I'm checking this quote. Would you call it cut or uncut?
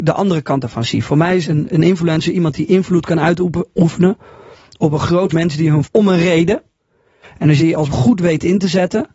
cut